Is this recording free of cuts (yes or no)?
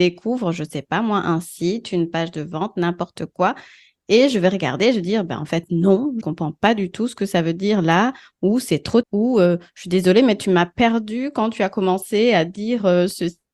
no